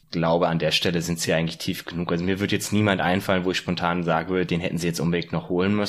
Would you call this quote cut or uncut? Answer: uncut